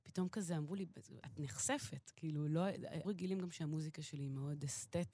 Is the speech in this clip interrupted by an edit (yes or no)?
yes